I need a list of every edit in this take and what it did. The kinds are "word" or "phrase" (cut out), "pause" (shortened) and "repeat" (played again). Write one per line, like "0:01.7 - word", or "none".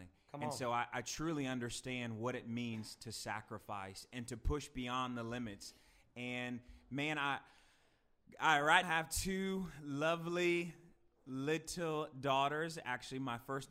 0:08.8 - word